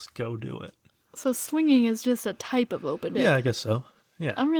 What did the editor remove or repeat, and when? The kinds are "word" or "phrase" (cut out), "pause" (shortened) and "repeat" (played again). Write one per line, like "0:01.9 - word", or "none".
0:03.1 - word

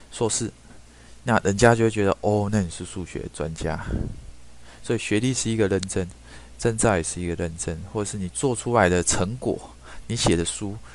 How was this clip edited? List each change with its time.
0:10.0 - phrase

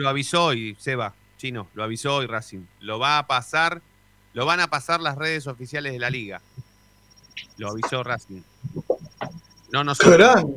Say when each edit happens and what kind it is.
none

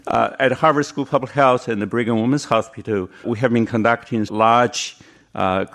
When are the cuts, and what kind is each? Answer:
0:03.2 - word
0:04.3 - word

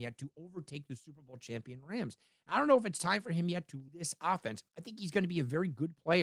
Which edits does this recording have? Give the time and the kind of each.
0:03.9 - word
0:04.7 - pause

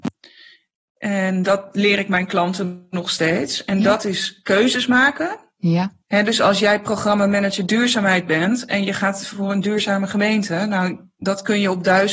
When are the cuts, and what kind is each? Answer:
0:06.0 - pause

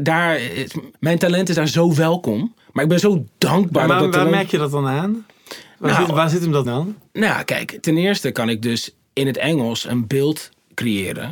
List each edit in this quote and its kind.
0:01.0 - pause
0:02.6 - pause
0:06.6 - word

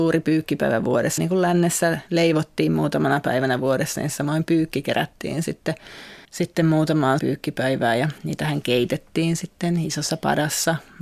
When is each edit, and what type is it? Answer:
0:01.2 - word
0:02.1 - pause
0:06.2 - pause
0:07.2 - word
0:08.2 - pause

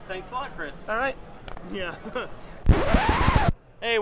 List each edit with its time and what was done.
0:02.6 - word

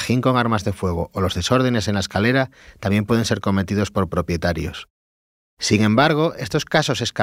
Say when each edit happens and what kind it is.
none

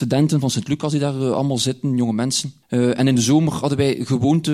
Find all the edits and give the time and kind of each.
0:02.6 - pause

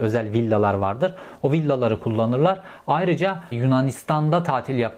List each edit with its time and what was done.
0:03.5 - word

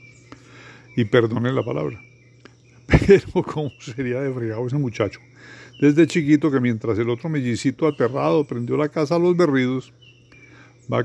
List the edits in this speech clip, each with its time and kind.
none

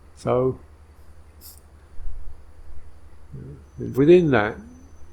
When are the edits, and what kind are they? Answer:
0:03.6 - pause
0:03.9 - word

